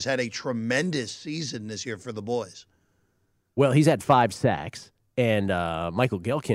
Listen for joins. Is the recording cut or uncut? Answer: uncut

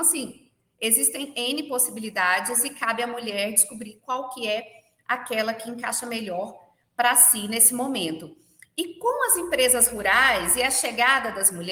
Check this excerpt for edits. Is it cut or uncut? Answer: uncut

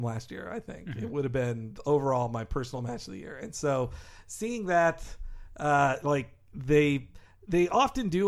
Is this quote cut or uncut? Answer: uncut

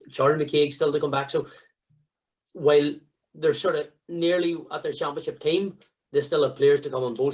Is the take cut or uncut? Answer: uncut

